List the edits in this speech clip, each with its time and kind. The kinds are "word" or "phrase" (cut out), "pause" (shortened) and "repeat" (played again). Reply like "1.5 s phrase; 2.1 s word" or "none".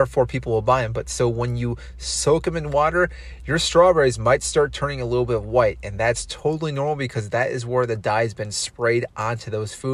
none